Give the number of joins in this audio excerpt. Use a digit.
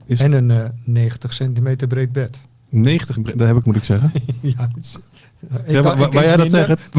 2